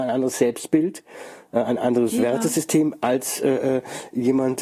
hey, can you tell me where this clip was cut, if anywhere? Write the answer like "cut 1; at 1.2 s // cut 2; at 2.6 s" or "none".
none